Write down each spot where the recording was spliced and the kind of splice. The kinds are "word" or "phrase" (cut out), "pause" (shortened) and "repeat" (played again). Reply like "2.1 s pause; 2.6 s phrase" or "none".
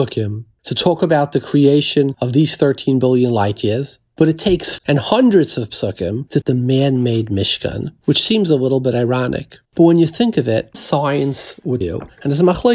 4.8 s phrase; 6.4 s phrase; 9.6 s pause; 10.7 s word; 11.8 s word